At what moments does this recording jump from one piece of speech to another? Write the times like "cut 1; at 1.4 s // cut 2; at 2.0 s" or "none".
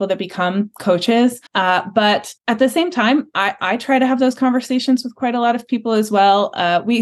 cut 1; at 1.5 s // cut 2; at 2.4 s